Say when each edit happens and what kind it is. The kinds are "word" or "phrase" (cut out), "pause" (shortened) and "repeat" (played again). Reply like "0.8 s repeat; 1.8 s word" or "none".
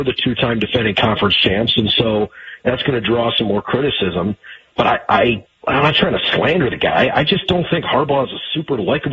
5.5 s pause